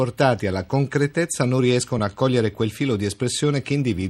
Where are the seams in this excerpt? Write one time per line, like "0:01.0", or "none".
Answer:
none